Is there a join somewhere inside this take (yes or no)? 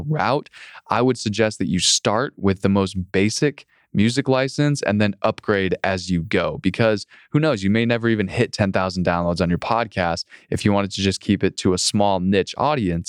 no